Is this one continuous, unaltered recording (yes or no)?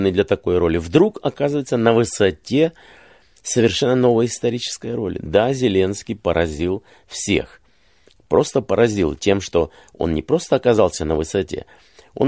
yes